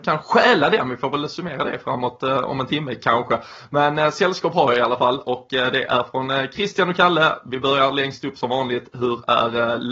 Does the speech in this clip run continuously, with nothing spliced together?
yes; 0 cuts

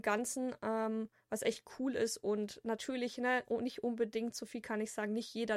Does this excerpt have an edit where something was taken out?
no; 0 cuts

